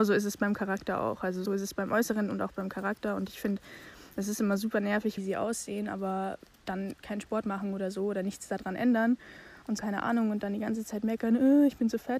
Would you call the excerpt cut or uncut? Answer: cut